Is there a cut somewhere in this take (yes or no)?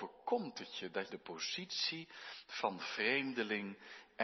yes